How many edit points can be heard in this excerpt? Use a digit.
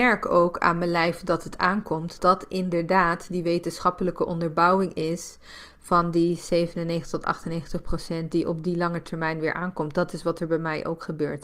1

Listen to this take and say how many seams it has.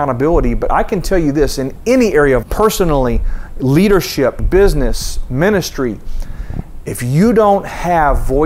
2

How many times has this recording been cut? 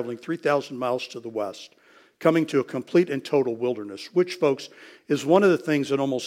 0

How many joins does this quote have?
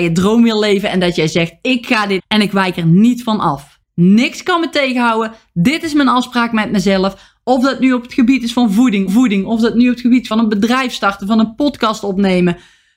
4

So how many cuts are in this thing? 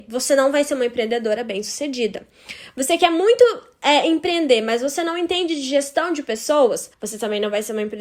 0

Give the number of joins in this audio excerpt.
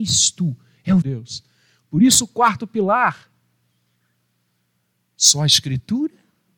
1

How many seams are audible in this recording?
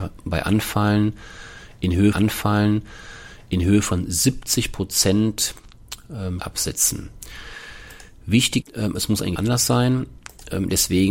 4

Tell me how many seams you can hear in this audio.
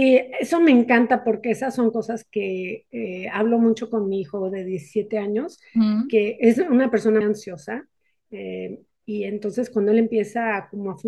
1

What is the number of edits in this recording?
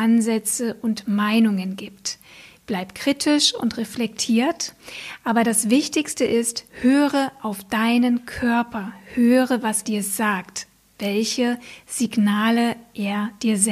2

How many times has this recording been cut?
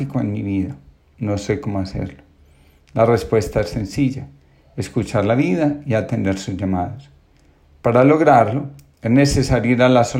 0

